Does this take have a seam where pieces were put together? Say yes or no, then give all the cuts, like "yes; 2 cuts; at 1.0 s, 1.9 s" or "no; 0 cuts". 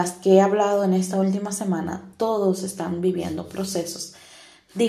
no; 0 cuts